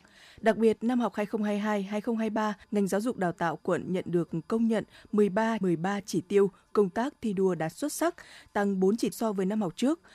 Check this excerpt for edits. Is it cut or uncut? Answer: cut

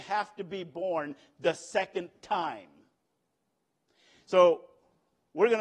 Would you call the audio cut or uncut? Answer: uncut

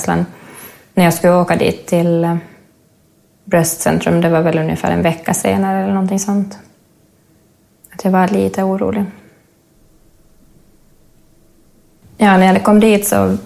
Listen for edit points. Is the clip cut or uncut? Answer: uncut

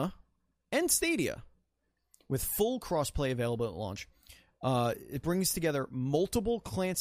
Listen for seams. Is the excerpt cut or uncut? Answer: uncut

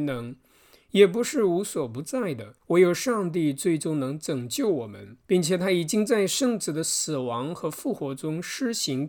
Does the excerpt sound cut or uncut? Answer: cut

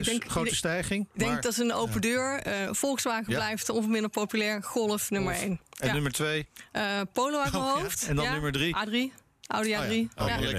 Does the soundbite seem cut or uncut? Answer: uncut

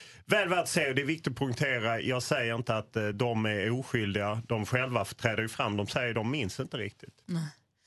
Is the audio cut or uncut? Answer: uncut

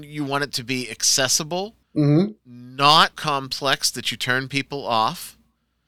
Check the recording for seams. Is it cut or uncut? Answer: cut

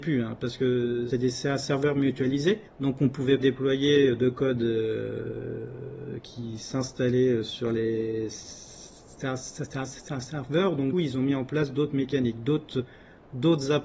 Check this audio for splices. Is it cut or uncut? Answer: cut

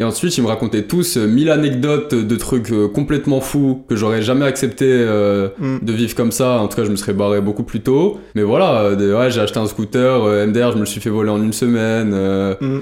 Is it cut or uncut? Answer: cut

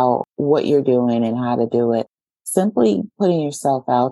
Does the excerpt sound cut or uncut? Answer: uncut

